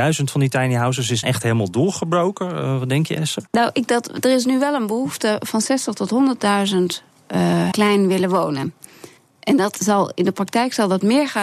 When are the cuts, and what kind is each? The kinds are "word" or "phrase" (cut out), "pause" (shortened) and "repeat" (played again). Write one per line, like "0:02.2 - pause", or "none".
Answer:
0:01.2 - word
0:03.5 - pause
0:03.9 - word
0:07.7 - phrase
0:09.2 - pause
0:09.7 - word